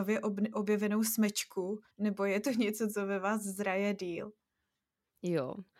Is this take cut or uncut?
cut